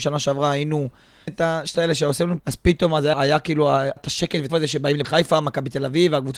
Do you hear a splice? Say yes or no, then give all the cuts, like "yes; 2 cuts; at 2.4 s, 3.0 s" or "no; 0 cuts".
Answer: yes; 7 cuts; at 1.3 s, 1.7 s, 2.4 s, 3.1 s, 4.0 s, 4.5 s, 5.0 s